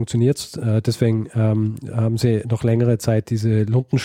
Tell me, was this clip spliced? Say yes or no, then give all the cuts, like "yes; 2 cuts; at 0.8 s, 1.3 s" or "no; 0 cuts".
no; 0 cuts